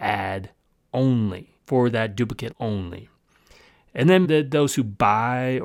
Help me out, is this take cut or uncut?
cut